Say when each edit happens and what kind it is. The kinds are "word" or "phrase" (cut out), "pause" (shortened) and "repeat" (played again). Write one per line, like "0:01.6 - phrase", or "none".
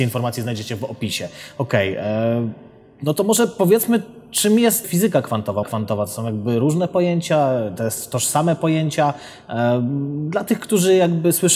0:04.8 - word
0:05.6 - word